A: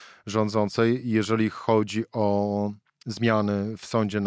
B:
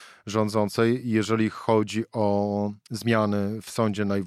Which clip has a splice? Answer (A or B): B